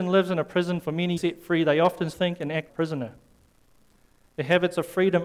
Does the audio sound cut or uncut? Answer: cut